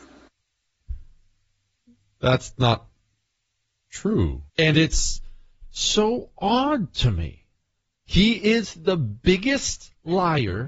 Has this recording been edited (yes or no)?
yes